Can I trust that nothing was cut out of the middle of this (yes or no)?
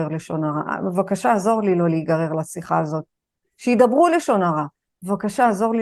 yes